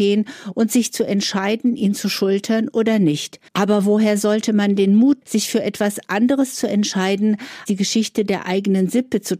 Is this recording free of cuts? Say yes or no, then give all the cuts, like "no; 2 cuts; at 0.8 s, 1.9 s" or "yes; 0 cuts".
no; 3 cuts; at 3.5 s, 5.2 s, 7.7 s